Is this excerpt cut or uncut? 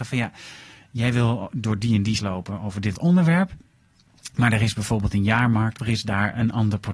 cut